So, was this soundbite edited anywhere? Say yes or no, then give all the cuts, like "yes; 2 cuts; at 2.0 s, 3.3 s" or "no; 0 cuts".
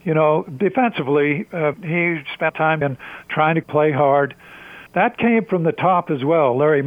yes; 6 cuts; at 1.7 s, 2.5 s, 2.8 s, 3.2 s, 3.6 s, 4.9 s